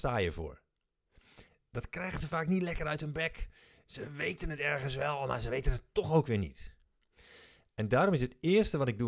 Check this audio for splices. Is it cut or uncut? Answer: uncut